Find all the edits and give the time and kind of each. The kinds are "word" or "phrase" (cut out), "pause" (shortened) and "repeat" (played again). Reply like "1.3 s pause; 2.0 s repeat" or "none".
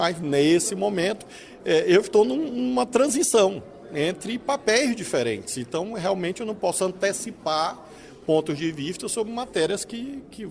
none